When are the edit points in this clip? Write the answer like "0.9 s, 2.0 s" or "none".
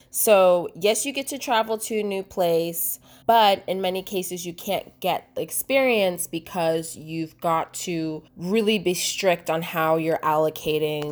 3.2 s, 5.4 s, 8.3 s